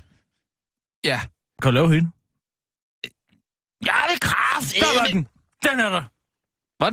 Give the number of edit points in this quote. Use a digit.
0